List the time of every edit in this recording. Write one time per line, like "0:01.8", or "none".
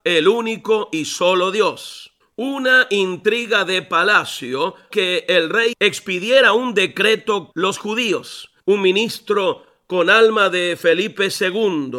0:02.2
0:04.9
0:05.7
0:07.5
0:08.6